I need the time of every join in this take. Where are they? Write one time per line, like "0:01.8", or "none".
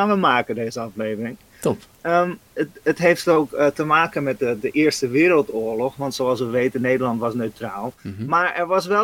0:02.5
0:08.0